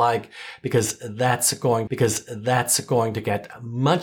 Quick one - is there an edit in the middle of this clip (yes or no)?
yes